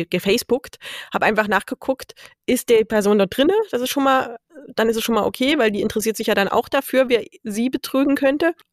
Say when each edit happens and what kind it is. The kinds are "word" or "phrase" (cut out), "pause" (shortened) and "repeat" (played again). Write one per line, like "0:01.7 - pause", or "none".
none